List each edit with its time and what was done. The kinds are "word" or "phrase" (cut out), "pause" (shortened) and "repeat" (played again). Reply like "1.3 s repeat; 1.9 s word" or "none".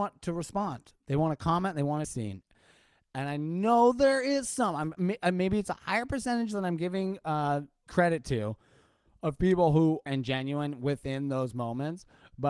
2.0 s phrase; 7.9 s word; 10.1 s phrase